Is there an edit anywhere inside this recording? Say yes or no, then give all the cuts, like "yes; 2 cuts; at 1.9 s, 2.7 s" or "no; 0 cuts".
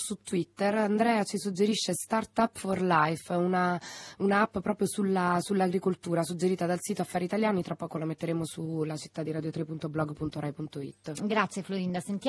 no; 0 cuts